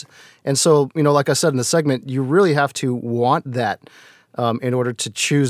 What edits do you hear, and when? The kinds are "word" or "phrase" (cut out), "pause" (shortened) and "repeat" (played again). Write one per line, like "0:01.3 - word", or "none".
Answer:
none